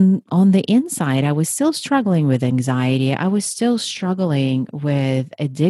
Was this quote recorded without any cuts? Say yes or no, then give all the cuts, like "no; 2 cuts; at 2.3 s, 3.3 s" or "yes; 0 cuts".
yes; 0 cuts